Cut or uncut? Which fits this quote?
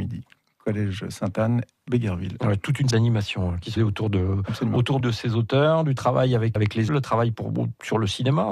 cut